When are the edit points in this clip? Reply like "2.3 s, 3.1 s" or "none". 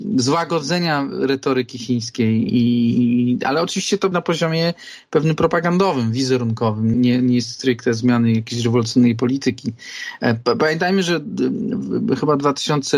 2.5 s, 4.1 s, 6.9 s